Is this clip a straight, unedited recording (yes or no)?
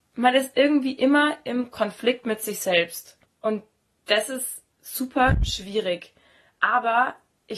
no